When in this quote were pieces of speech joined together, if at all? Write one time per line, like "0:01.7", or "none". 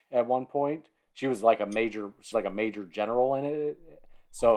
0:02.3